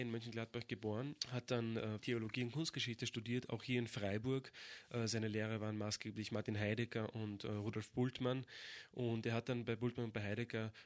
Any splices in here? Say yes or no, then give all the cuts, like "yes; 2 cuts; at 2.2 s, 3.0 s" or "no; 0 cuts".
yes; 1 cut; at 2.0 s